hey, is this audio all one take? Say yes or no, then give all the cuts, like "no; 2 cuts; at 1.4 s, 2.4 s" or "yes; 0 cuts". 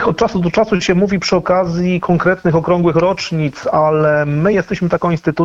yes; 0 cuts